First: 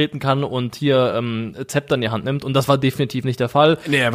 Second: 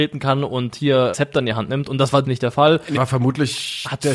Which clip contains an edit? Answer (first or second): second